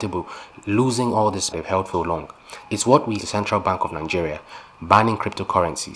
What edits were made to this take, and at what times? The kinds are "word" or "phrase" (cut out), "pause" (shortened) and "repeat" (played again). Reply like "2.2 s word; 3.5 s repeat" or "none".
1.5 s phrase; 1.9 s word; 3.2 s phrase